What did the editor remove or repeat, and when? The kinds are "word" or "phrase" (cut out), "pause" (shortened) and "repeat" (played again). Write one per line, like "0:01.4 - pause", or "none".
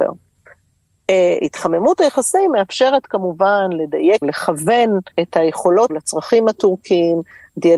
0:04.2 - phrase
0:05.1 - pause
0:05.9 - word